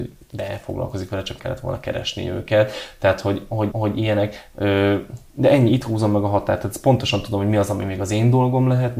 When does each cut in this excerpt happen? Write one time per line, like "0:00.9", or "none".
0:01.4
0:03.7